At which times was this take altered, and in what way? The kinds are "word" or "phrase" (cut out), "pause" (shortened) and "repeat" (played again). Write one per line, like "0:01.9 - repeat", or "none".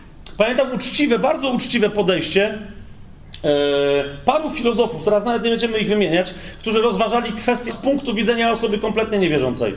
0:07.7 - phrase